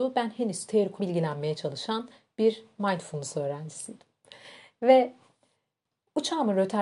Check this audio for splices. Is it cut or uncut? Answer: cut